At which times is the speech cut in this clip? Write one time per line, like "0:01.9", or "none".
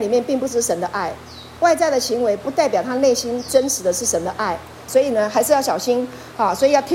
0:01.6
0:04.9